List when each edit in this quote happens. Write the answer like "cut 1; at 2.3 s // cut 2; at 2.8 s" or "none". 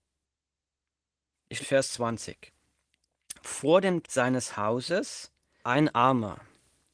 cut 1; at 1.6 s // cut 2; at 4.0 s // cut 3; at 5.6 s